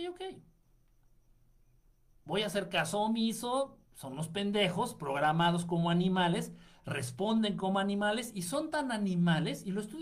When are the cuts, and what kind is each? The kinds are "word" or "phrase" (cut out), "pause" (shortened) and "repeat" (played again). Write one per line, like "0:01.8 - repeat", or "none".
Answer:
0:03.9 - pause